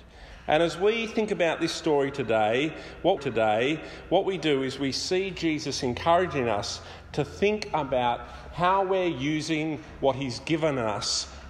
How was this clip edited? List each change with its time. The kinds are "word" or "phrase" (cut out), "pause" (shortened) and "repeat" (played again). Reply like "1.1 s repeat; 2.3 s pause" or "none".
3.2 s repeat